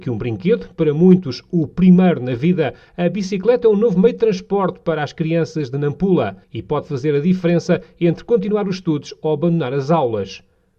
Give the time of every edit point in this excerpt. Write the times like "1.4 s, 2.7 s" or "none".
6.4 s

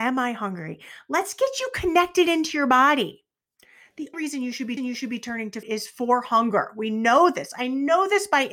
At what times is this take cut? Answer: 4.1 s, 4.8 s, 5.6 s

